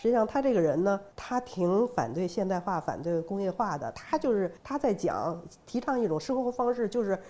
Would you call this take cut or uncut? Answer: cut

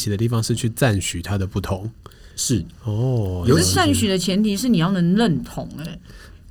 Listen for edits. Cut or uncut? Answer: cut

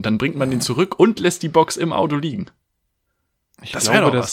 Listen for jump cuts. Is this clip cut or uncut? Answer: uncut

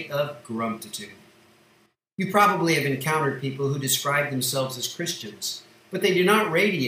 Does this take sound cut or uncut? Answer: uncut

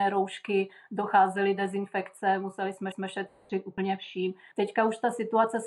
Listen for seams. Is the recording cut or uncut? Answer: cut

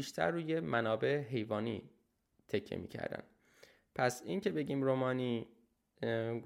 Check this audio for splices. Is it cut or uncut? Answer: uncut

